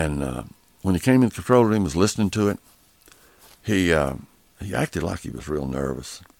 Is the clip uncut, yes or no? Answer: yes